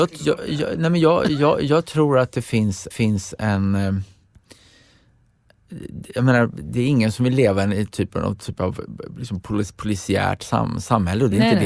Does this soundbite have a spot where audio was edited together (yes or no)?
yes